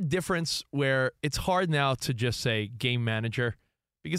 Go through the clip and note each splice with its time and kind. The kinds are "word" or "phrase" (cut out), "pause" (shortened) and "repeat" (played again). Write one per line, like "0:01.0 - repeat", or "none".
none